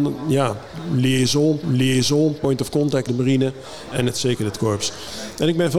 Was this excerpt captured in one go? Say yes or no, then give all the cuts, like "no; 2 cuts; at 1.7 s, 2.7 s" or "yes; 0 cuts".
no; 3 cuts; at 1.6 s, 3.1 s, 3.9 s